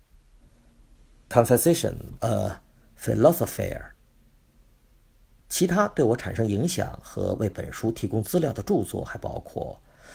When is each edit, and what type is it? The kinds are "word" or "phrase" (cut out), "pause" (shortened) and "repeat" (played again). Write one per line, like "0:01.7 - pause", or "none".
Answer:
0:02.2 - word